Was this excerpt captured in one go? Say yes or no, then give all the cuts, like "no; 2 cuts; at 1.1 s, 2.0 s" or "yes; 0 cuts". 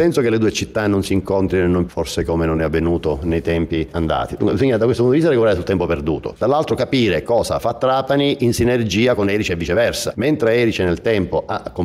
no; 1 cut; at 1.9 s